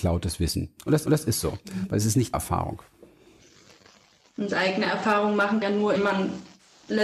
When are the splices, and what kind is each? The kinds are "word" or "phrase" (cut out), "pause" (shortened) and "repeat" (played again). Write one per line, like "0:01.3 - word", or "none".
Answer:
0:01.1 - repeat
0:02.3 - word
0:05.6 - phrase
0:06.0 - word